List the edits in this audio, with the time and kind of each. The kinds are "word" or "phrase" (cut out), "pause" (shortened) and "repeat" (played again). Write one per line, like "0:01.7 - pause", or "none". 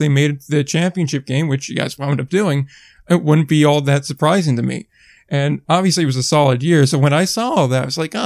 none